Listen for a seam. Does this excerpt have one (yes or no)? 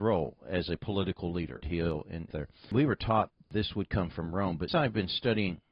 yes